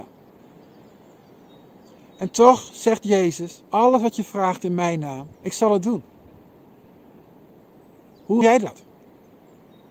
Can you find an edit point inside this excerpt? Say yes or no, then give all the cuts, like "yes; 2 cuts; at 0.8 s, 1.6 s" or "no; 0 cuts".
yes; 3 cuts; at 3.6 s, 5.3 s, 8.4 s